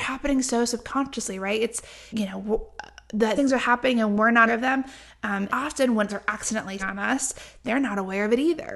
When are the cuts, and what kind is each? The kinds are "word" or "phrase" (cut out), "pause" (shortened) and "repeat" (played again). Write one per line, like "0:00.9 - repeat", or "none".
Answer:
0:02.1 - word
0:03.4 - word
0:04.5 - word
0:05.5 - word
0:06.1 - word
0:06.8 - word